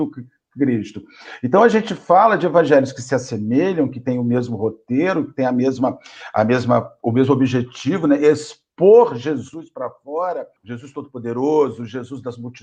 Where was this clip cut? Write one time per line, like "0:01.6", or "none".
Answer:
0:10.6